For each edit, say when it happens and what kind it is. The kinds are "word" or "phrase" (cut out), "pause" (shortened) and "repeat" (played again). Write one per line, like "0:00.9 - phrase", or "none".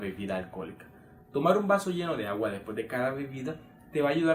none

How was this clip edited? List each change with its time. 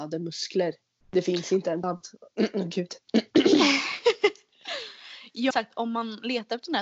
0:01.0 - pause
0:01.8 - word
0:05.5 - word

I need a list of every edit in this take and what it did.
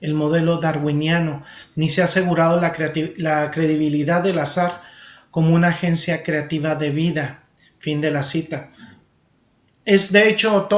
none

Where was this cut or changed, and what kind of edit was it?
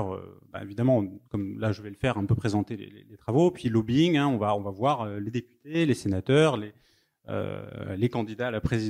0:01.2 - pause

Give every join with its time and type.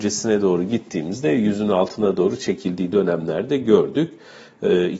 none

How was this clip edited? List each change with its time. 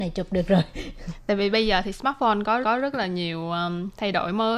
0:02.6 - repeat

